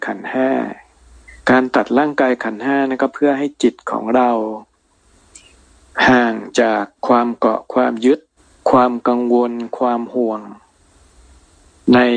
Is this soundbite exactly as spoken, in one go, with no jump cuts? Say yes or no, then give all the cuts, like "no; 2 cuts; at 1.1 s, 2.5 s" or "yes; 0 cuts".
no; 3 cuts; at 1.4 s, 7.0 s, 8.4 s